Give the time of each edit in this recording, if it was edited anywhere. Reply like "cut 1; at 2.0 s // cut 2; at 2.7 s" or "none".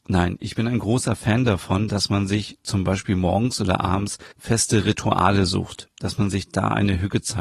cut 1; at 4.3 s